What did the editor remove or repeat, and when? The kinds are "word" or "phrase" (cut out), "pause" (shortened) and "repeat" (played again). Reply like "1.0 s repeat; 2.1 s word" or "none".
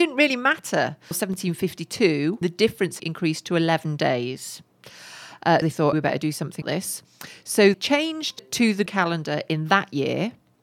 1.1 s word; 2.4 s word; 3.0 s word; 5.6 s word; 5.9 s word; 6.6 s word; 7.7 s word; 8.4 s word; 8.9 s word